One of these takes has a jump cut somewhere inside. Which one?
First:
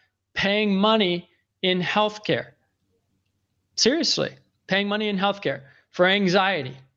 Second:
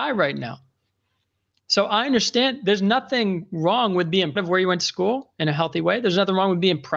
second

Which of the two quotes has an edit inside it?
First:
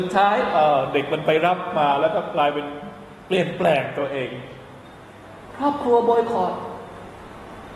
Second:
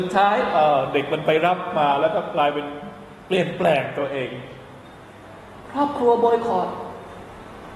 first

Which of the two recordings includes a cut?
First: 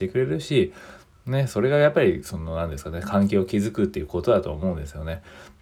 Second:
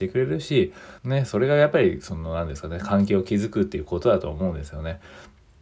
second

